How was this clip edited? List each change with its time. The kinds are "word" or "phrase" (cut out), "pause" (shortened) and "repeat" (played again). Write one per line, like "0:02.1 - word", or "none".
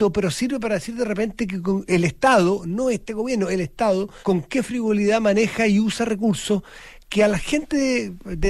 0:04.2 - pause